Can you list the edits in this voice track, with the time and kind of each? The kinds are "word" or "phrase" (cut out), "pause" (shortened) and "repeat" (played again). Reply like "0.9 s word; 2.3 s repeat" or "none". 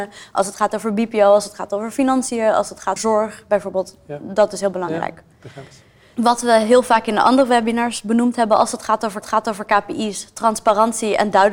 3.0 s word; 9.2 s repeat